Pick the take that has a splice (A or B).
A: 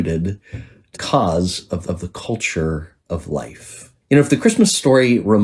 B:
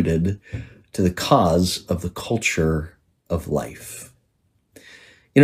A